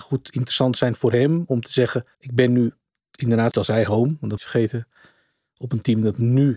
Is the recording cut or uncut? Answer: cut